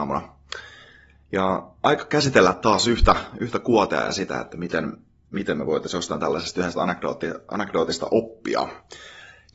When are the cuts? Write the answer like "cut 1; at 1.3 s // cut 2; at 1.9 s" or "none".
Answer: none